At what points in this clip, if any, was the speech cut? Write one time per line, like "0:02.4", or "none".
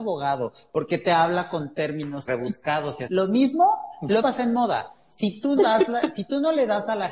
0:02.3
0:03.1
0:04.2
0:05.6